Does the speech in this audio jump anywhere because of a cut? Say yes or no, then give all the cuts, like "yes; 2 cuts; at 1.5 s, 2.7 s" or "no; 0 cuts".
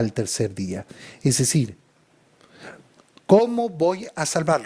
no; 0 cuts